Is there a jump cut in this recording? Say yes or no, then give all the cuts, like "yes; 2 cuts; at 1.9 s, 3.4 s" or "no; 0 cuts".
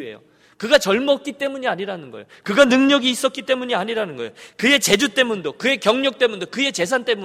no; 0 cuts